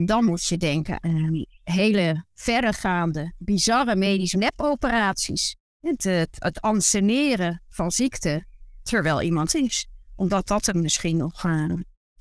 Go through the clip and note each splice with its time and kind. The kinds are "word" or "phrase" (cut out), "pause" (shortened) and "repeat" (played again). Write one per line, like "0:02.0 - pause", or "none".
0:01.0 - word
0:04.3 - phrase
0:09.5 - phrase